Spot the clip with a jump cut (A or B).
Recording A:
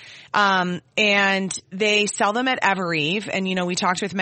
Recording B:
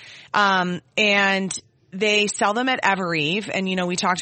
A